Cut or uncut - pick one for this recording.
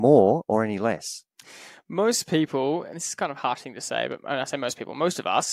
uncut